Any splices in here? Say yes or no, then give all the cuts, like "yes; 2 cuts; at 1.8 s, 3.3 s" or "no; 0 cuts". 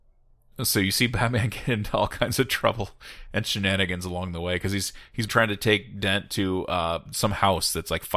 yes; 2 cuts; at 5.3 s, 7.1 s